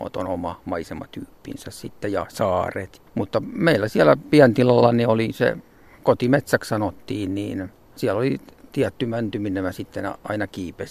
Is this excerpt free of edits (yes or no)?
yes